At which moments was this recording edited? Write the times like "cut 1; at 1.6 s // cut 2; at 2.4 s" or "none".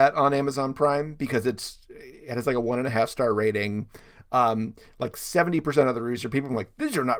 none

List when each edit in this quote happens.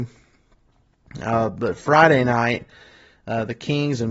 none

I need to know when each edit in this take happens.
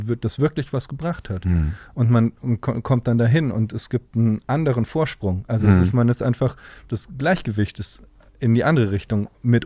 none

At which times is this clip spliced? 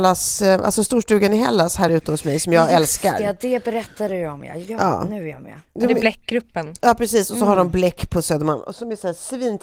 none

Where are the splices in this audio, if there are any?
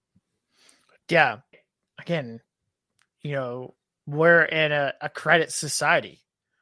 cut 1; at 1.5 s

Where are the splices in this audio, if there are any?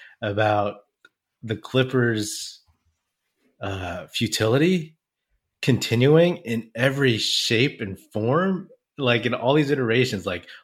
none

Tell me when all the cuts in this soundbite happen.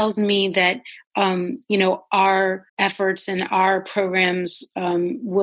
cut 1; at 2.7 s

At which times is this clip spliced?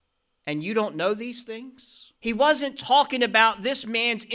cut 1; at 2.2 s

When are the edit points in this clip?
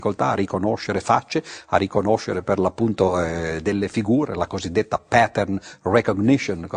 none

